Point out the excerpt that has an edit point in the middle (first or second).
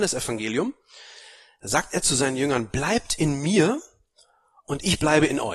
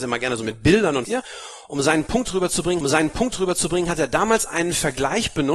second